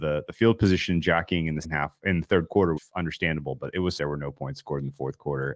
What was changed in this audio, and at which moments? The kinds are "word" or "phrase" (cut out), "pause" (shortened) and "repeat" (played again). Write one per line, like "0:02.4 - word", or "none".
0:01.6 - word
0:02.8 - word
0:04.0 - phrase